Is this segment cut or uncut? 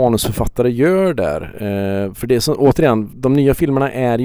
uncut